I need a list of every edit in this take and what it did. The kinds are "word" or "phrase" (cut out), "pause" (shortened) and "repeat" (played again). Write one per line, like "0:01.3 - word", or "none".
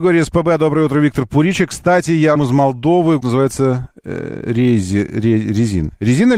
0:02.4 - word
0:03.2 - word